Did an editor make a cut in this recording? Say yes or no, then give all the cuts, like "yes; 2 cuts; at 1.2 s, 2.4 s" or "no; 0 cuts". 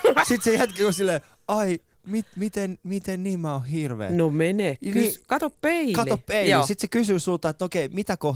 no; 0 cuts